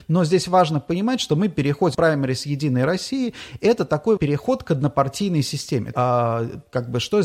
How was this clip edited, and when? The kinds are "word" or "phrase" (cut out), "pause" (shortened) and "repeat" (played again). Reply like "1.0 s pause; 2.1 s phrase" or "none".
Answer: 1.9 s word; 4.2 s word; 5.9 s phrase

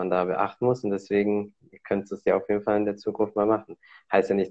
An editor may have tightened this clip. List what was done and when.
none

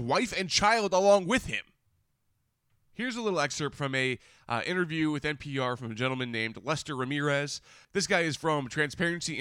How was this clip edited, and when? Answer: none

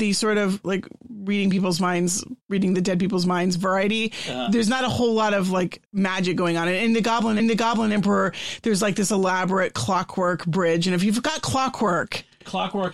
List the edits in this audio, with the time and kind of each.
2.4 s pause; 5.9 s pause; 7.4 s repeat

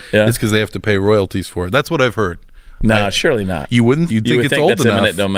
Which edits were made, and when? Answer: 4.1 s word

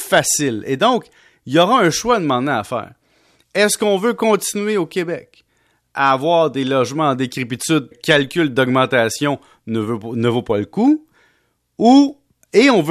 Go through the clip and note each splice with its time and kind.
7.9 s phrase

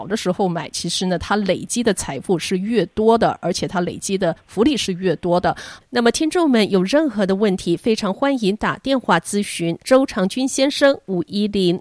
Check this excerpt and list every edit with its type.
9.8 s pause

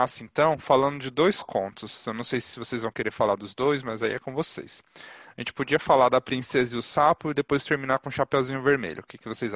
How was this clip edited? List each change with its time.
none

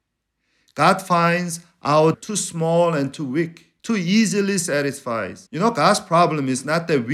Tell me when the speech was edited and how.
2.1 s word; 3.8 s pause; 5.5 s pause

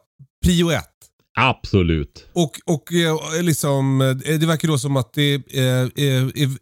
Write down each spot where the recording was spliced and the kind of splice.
none

